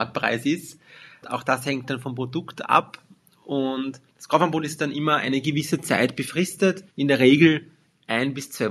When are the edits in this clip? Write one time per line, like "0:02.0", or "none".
0:04.1
0:06.9